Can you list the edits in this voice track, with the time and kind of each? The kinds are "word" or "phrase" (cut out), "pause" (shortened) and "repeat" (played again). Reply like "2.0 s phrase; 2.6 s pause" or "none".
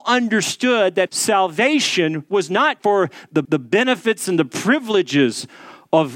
1.1 s word; 2.8 s word; 3.4 s repeat